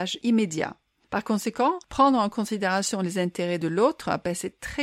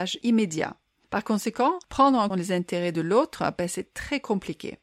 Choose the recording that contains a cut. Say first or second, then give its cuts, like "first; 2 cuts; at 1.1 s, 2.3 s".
second; 1 cut; at 2.3 s